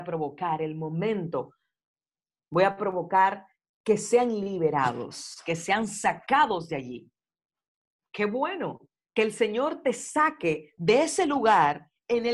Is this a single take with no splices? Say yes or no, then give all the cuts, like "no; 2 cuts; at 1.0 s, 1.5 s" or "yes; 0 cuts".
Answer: yes; 0 cuts